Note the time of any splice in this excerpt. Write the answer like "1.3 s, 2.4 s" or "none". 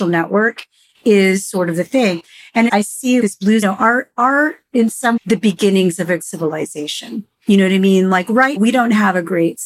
2.7 s, 3.2 s, 3.6 s, 5.2 s, 6.2 s, 8.6 s